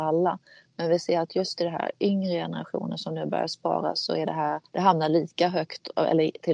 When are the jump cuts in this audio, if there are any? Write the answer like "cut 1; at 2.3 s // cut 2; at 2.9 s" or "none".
cut 1; at 4.7 s